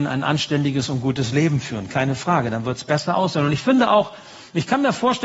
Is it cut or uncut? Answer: uncut